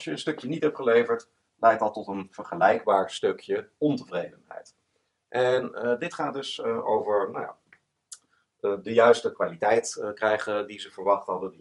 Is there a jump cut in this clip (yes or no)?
no